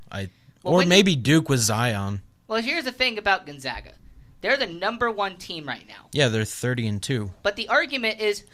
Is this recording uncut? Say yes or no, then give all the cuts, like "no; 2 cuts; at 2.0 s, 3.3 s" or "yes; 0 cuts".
yes; 0 cuts